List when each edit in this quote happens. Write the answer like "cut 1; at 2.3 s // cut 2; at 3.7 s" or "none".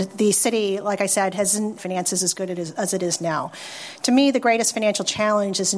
cut 1; at 1.8 s